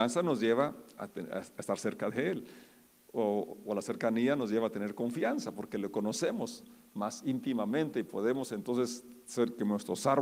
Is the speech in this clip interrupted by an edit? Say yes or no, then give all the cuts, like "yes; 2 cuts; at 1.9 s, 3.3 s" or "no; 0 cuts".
no; 0 cuts